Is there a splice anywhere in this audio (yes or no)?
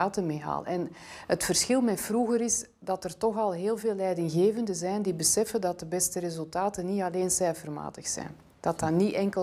no